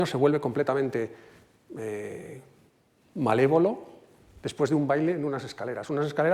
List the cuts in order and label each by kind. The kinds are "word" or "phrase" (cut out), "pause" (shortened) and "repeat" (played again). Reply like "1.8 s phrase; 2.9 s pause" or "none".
none